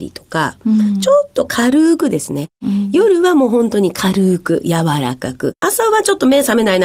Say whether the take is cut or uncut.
cut